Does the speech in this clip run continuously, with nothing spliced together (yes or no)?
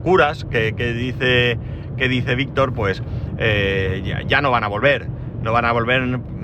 yes